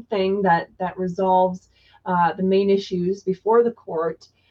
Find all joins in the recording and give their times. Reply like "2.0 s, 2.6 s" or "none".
none